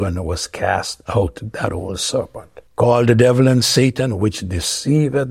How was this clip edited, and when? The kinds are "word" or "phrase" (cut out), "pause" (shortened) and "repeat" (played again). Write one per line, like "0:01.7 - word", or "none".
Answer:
0:02.7 - pause